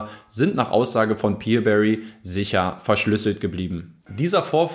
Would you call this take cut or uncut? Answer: uncut